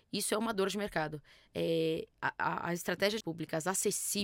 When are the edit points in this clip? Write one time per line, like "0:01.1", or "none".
0:02.1
0:03.2